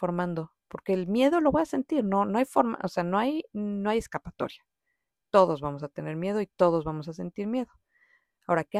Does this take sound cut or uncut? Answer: uncut